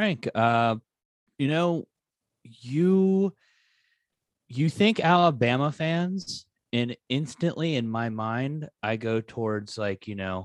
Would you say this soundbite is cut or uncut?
uncut